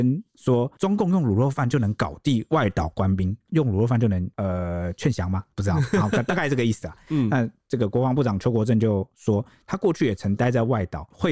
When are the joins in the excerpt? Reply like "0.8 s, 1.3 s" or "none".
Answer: none